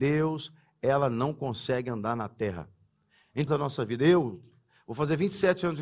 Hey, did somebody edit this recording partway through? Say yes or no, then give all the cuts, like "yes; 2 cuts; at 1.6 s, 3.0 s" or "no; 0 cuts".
yes; 1 cut; at 3.5 s